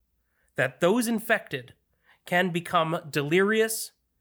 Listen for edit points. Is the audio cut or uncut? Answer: uncut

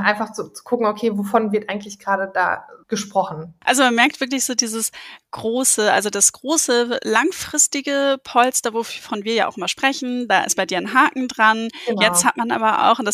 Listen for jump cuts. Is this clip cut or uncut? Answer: cut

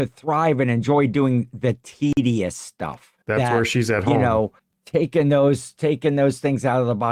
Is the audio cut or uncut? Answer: cut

